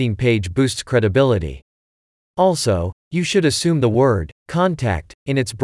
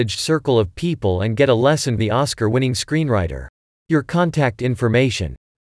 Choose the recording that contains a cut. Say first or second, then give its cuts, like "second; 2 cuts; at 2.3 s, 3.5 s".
second; 2 cuts; at 2.0 s, 3.6 s